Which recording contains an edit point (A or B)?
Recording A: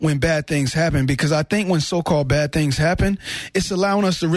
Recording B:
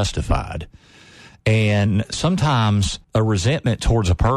B